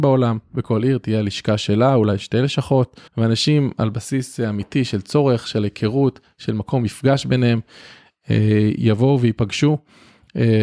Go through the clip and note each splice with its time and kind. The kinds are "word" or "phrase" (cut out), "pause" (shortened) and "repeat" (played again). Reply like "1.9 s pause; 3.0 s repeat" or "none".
3.1 s pause